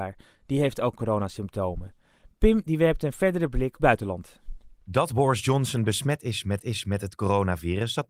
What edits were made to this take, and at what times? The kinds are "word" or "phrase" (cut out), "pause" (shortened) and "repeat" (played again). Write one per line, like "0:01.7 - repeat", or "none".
0:03.8 - phrase
0:06.6 - repeat